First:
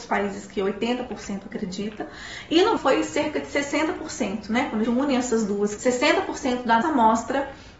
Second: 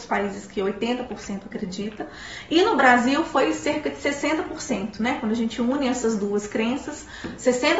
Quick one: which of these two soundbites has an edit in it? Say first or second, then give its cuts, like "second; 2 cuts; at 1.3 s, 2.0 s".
first; 4 cuts; at 2.8 s, 4.8 s, 5.8 s, 6.8 s